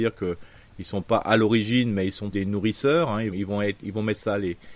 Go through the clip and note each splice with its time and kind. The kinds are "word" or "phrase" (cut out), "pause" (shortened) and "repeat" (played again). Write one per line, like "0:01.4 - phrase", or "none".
0:02.3 - word
0:03.3 - word